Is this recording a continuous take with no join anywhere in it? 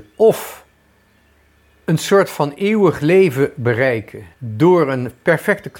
no; 1 cut; at 4.3 s

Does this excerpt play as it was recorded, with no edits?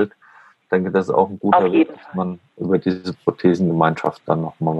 yes; 0 cuts

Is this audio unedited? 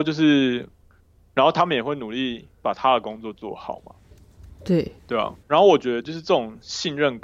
no; 2 cuts; at 5.0 s, 5.4 s

